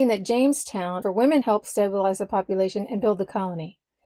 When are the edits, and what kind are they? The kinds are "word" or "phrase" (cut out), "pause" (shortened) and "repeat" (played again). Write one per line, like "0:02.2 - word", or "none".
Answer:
0:01.0 - word
0:01.4 - phrase